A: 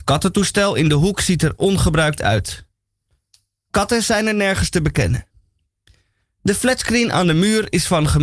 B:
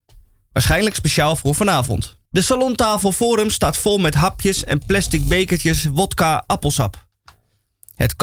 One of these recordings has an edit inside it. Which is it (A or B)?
B